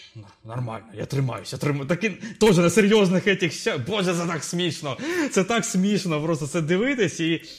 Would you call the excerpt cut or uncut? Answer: uncut